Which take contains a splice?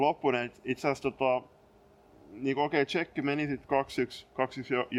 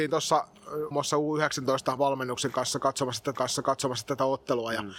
second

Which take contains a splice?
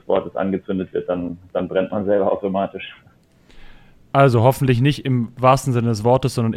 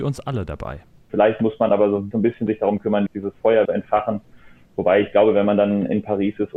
second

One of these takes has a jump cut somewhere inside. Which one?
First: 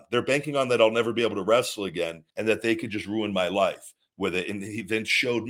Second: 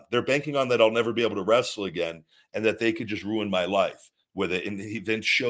first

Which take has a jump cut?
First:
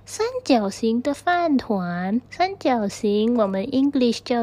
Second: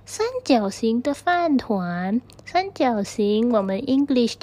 first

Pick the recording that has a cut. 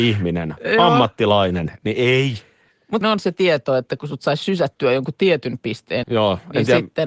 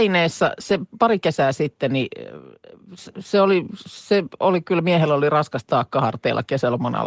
first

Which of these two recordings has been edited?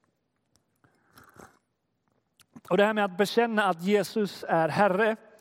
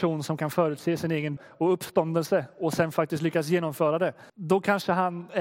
second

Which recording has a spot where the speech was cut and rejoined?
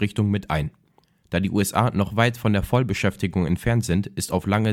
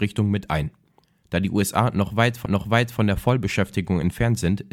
second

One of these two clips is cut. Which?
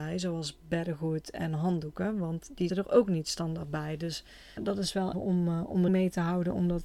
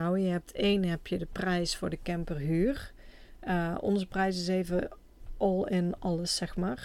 first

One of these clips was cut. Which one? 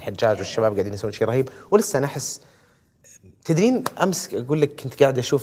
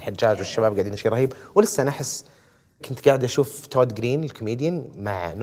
second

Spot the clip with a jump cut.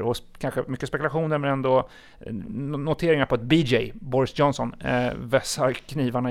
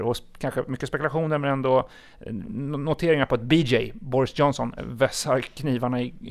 second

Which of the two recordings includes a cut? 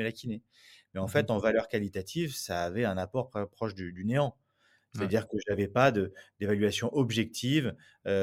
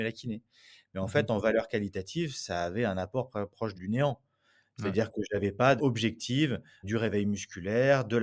second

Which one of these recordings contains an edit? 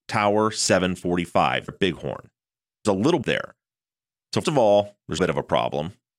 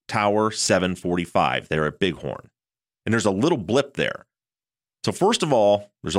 first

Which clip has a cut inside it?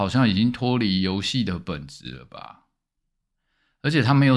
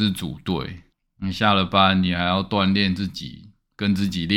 second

